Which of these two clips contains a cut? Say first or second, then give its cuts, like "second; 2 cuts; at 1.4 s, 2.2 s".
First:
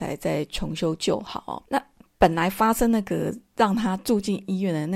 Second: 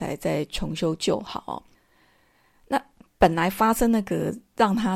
first; 1 cut; at 1.7 s